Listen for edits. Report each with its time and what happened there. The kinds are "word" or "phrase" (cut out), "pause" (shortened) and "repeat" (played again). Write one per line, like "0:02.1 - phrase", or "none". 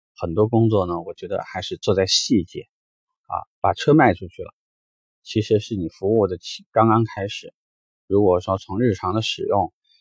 none